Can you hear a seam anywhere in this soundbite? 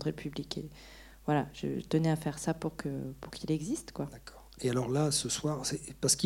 no; 0 cuts

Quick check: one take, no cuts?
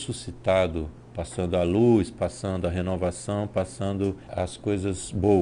yes; 0 cuts

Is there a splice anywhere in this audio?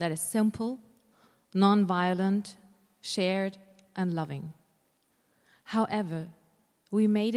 no; 0 cuts

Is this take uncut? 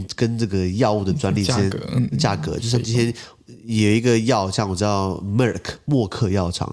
yes; 0 cuts

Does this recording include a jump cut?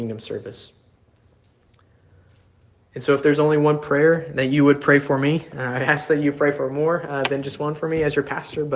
no; 0 cuts

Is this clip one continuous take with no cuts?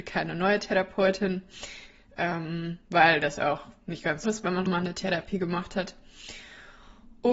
no; 2 cuts; at 4.2 s, 4.7 s

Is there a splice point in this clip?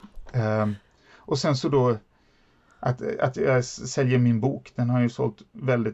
no; 0 cuts

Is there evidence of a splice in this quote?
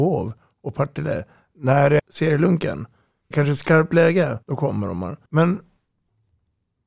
yes; 4 cuts; at 2.0 s, 3.3 s, 4.4 s, 5.3 s

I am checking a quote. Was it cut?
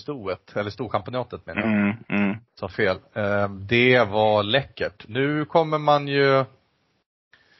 yes; 1 cut; at 2.5 s

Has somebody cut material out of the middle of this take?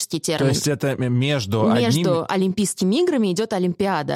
no; 0 cuts

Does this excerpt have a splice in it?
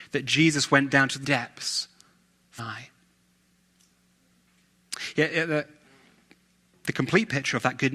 yes; 2 cuts; at 1.2 s, 2.6 s

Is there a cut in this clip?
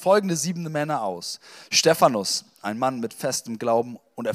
no; 0 cuts

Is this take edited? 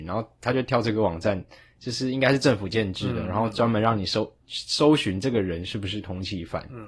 no; 0 cuts

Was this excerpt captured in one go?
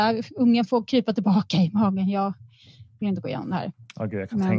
yes; 0 cuts

